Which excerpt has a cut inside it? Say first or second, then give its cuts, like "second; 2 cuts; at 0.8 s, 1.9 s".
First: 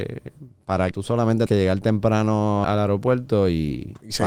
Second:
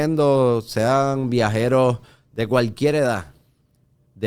first; 3 cuts; at 0.9 s, 1.5 s, 2.6 s